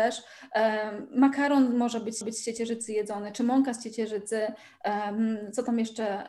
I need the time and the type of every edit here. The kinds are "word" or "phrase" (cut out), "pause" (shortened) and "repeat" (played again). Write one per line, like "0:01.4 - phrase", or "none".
0:02.2 - repeat